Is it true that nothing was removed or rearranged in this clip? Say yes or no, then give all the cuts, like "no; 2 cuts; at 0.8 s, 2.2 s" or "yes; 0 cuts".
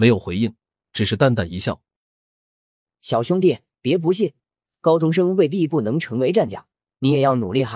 yes; 0 cuts